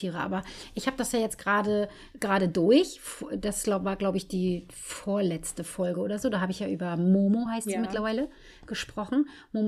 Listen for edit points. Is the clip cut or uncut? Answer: uncut